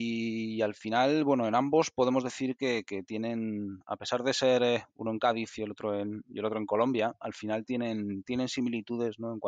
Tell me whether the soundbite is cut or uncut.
uncut